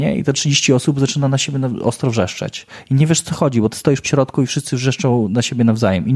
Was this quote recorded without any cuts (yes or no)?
no